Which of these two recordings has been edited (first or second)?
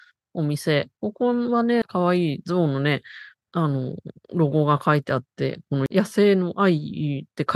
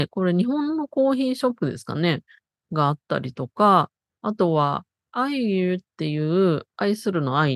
first